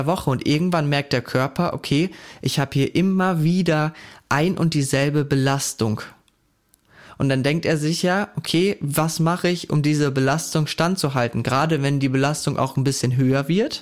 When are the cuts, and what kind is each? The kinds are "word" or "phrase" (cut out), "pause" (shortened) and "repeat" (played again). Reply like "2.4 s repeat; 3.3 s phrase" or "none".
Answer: none

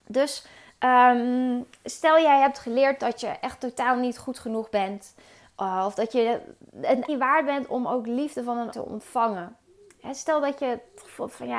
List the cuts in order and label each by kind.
7.1 s word; 8.7 s word

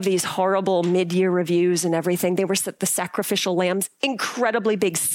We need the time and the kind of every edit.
none

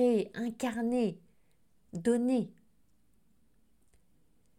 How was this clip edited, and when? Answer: none

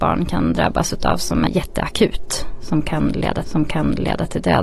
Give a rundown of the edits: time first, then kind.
1.5 s word; 3.4 s repeat

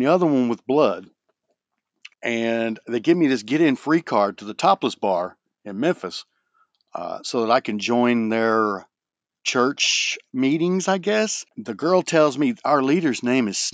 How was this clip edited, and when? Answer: 2.1 s pause; 11.5 s pause

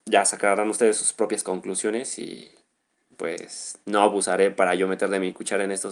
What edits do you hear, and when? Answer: none

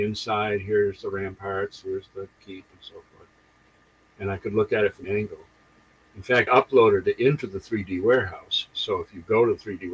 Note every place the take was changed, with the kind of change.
2.4 s word; 5.0 s word; 6.5 s word

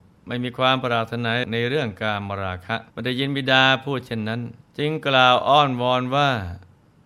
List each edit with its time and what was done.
2.9 s pause; 4.6 s pause

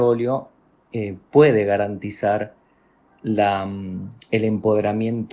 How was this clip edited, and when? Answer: none

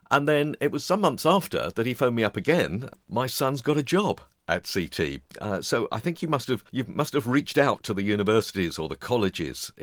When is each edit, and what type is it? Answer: 6.7 s pause

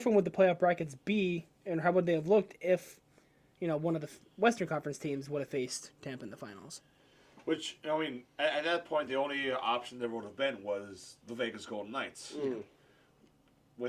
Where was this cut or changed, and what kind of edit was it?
none

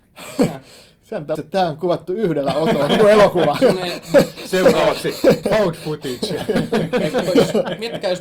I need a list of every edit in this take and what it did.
1.3 s word; 3.6 s word; 5.4 s word

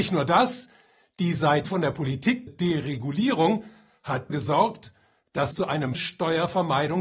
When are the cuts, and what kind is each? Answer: 1.6 s word; 2.5 s word; 4.3 s word; 5.5 s word; 5.9 s word

